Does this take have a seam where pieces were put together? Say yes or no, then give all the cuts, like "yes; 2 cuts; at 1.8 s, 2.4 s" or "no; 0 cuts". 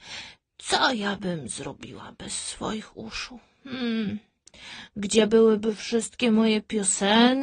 no; 0 cuts